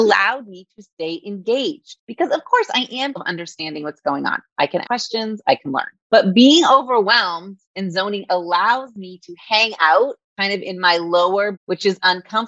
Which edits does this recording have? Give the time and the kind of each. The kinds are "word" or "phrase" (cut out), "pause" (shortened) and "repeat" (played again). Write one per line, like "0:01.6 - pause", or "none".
0:03.2 - word
0:04.8 - word
0:08.3 - word
0:11.5 - word